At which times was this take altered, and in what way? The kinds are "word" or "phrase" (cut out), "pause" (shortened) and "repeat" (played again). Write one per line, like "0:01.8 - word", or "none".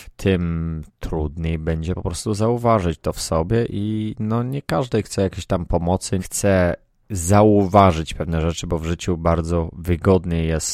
0:06.2 - phrase